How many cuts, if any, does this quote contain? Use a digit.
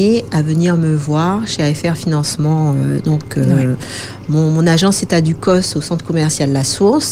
0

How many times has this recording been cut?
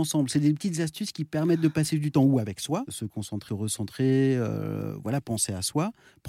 2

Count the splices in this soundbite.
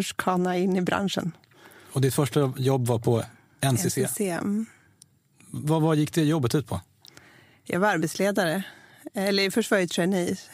0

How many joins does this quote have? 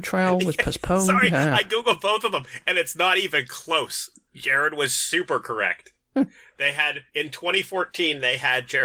1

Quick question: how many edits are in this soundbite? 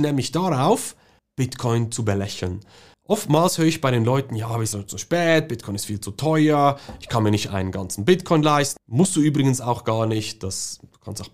1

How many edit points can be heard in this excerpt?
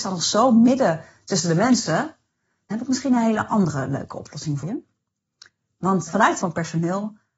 4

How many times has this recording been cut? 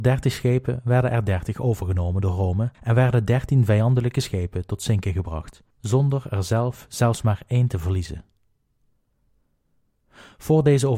2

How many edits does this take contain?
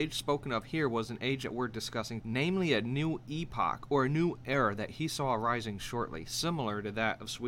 1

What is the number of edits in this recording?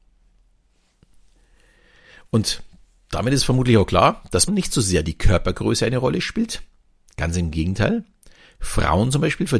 1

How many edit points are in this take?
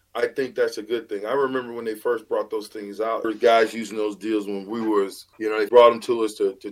3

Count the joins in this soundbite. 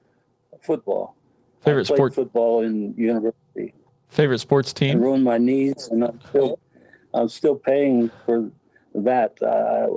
0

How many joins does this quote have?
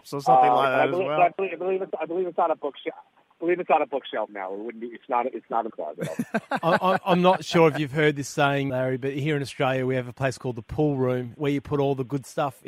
4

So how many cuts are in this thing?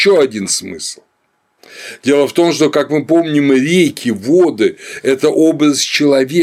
0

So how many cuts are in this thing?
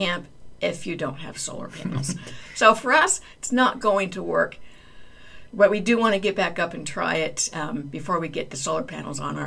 0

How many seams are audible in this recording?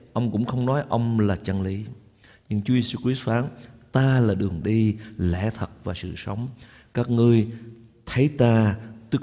0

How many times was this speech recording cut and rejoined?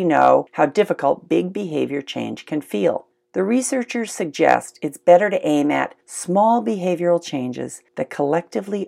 3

